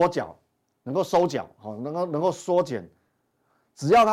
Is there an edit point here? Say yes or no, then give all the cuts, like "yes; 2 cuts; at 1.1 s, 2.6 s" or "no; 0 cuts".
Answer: no; 0 cuts